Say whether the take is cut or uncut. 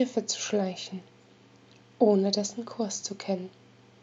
uncut